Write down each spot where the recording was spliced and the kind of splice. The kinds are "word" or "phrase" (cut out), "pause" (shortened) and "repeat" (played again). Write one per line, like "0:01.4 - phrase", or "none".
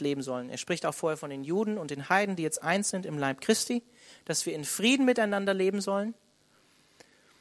none